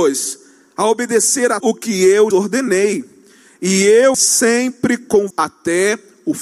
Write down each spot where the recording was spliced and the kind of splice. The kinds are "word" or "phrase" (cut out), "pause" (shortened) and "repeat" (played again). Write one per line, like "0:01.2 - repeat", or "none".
0:01.6 - word
0:02.3 - word
0:04.1 - word
0:05.3 - word